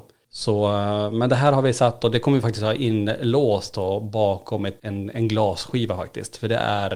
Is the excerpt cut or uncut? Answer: uncut